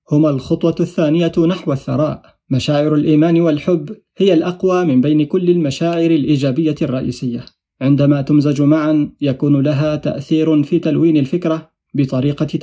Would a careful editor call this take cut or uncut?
uncut